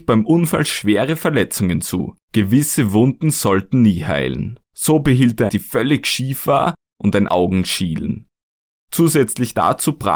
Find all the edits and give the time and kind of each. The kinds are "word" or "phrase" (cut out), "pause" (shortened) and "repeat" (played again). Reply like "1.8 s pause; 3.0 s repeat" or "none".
2.2 s pause; 4.6 s pause; 5.5 s phrase; 7.3 s word